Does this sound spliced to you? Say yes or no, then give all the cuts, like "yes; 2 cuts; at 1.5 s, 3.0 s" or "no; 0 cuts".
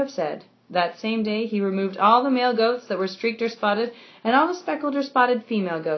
no; 0 cuts